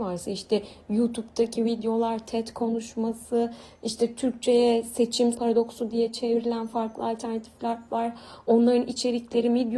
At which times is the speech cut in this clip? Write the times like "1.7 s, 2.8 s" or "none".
5.3 s